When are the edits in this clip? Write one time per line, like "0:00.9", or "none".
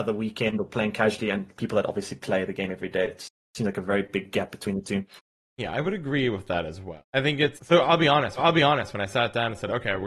0:01.5
0:07.1
0:07.6
0:08.4